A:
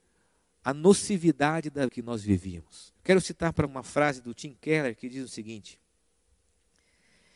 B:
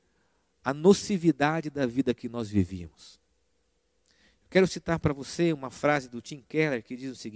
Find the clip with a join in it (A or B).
A